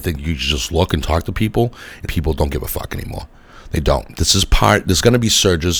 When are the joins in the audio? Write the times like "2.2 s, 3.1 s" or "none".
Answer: 2.0 s